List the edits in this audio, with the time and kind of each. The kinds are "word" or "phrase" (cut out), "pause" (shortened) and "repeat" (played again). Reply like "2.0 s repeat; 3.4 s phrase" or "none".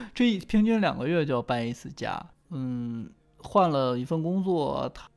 2.3 s pause